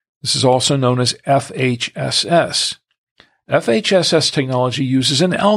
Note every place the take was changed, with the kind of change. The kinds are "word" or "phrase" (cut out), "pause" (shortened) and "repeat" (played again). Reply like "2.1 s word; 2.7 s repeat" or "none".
none

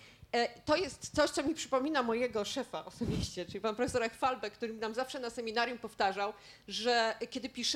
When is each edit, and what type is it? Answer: none

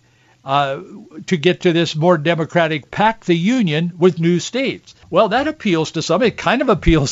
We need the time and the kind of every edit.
2.8 s phrase; 5.0 s pause

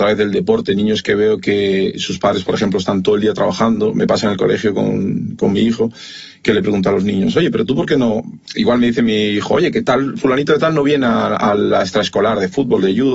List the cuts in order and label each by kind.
none

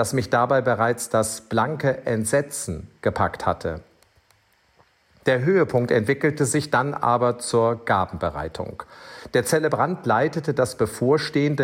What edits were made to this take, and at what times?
none

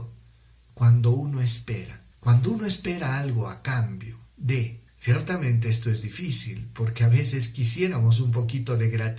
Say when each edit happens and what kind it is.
2.1 s pause; 4.9 s pause

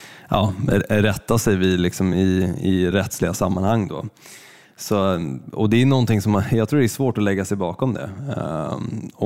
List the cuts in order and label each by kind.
none

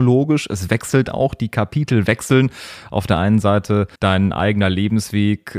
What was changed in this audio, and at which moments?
3.9 s pause

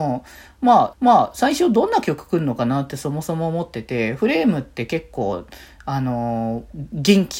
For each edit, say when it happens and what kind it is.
0.9 s repeat

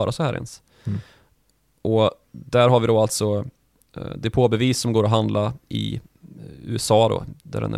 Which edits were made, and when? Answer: none

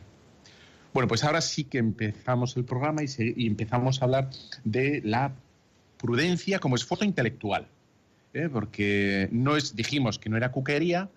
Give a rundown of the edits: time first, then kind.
none

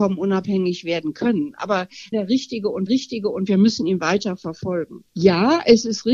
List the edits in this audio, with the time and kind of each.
2.1 s phrase; 2.9 s repeat; 5.1 s pause

